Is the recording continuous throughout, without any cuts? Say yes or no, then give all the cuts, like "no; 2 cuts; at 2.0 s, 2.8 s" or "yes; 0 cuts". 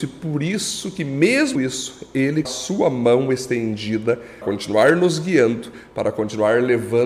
no; 3 cuts; at 1.5 s, 2.4 s, 4.4 s